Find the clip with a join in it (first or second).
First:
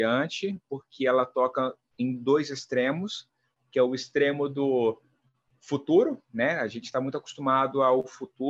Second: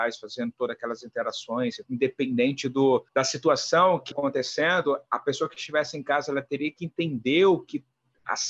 second